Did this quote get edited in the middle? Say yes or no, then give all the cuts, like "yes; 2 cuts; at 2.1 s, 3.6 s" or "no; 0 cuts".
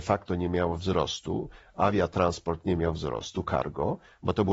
no; 0 cuts